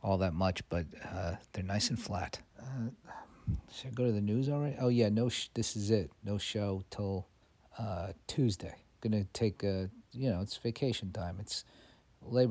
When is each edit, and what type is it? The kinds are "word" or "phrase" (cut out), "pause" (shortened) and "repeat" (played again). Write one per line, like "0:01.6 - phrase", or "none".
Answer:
0:02.5 - pause
0:06.2 - pause
0:07.4 - pause
0:08.9 - pause